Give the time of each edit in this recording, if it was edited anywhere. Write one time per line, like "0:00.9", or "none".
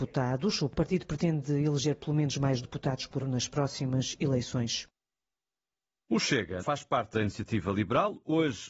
0:02.6
0:03.2
0:06.6
0:07.1